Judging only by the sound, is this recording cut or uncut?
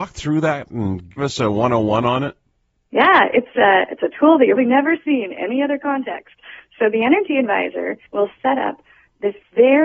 cut